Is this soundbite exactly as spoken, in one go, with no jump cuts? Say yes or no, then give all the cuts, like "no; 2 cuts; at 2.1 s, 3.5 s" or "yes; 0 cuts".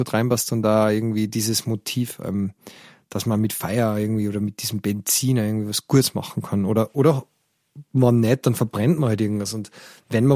yes; 0 cuts